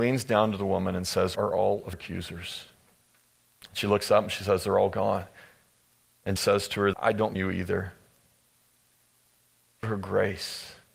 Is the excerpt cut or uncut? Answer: cut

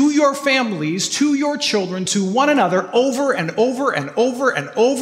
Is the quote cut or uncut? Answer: uncut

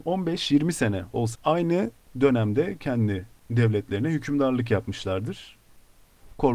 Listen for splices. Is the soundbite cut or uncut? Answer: cut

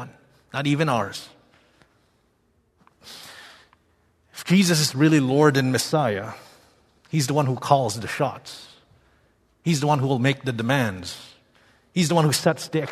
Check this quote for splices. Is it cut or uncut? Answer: uncut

